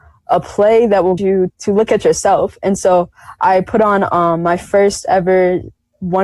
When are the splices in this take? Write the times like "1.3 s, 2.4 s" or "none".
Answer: 1.2 s, 1.5 s